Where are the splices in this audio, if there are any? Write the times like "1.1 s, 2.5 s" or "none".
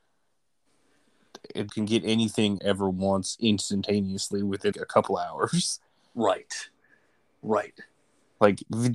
1.7 s, 2.6 s, 4.7 s